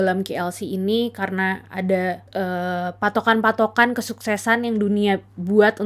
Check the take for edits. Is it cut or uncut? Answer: cut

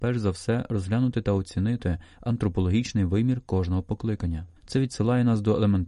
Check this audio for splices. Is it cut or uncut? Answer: cut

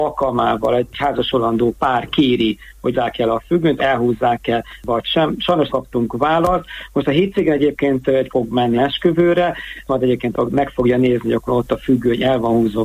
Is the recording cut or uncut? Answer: cut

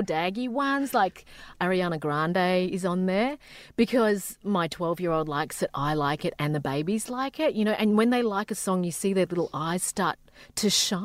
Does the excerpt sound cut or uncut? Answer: cut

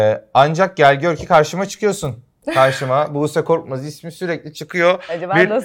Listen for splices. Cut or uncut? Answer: uncut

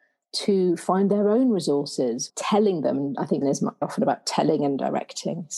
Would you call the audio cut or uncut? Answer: cut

